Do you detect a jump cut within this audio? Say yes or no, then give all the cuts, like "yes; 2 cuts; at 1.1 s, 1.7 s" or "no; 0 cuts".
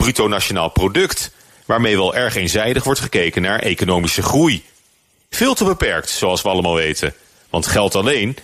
no; 0 cuts